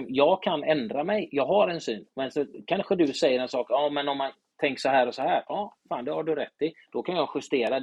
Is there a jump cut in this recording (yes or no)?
no